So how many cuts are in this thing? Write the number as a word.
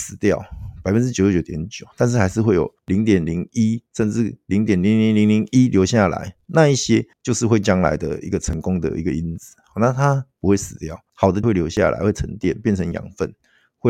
five